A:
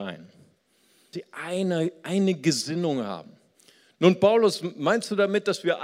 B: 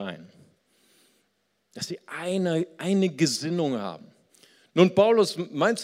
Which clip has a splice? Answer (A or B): A